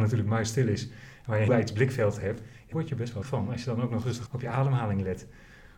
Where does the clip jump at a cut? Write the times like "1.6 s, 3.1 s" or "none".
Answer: 1.5 s, 2.7 s, 3.2 s, 4.3 s

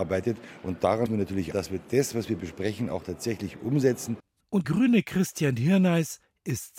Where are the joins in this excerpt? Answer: 1.1 s, 1.5 s, 4.6 s

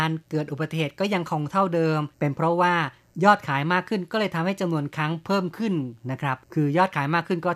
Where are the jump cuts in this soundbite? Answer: 2.1 s, 6.4 s

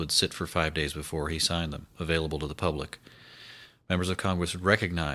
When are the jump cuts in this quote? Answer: none

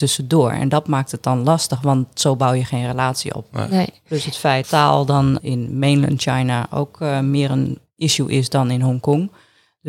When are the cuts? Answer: 4.6 s, 5.4 s

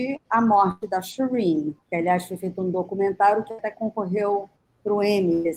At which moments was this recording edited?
1.8 s, 4.7 s

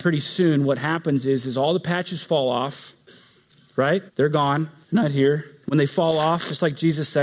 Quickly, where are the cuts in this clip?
4.1 s, 4.8 s, 5.6 s

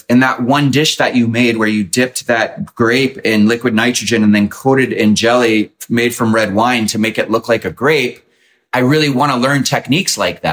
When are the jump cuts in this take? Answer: none

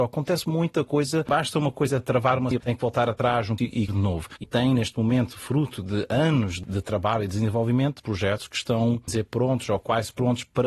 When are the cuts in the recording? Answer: 2.5 s, 3.6 s, 3.9 s, 4.4 s, 8.0 s, 9.1 s

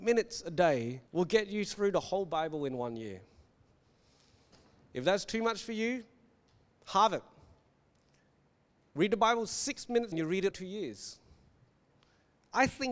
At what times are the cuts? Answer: 1.1 s, 10.1 s, 10.5 s

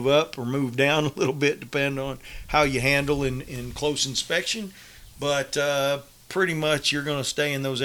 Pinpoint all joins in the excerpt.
none

